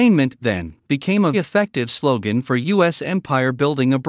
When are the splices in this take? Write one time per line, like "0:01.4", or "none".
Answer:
0:01.3